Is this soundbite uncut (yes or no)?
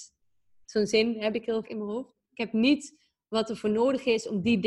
no